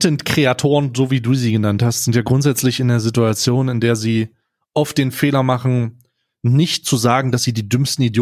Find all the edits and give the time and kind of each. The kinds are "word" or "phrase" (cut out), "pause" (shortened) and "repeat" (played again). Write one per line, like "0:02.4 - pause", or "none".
none